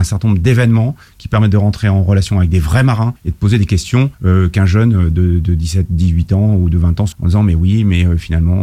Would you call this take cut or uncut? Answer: cut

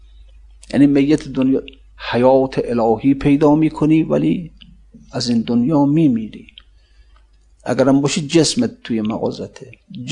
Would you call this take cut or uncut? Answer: uncut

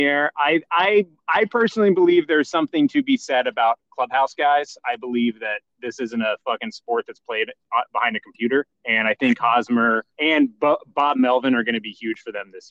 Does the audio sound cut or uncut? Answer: cut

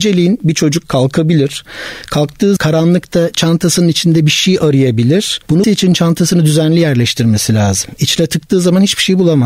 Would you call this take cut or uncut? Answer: cut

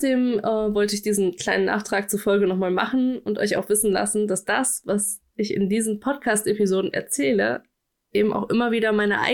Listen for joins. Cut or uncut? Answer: uncut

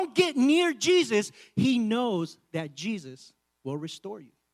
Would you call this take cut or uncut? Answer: uncut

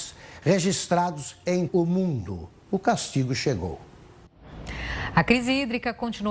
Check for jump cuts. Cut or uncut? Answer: cut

